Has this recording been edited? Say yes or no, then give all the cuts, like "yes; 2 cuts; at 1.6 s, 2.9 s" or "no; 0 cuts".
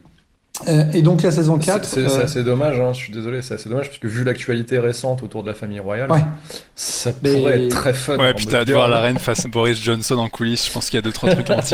yes; 2 cuts; at 8.7 s, 9.4 s